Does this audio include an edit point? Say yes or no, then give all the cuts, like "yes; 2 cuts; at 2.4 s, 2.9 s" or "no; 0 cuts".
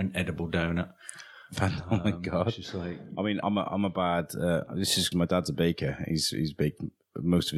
yes; 2 cuts; at 3.4 s, 5.1 s